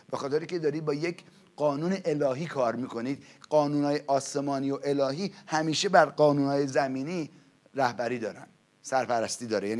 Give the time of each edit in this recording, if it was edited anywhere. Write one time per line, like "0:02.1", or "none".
none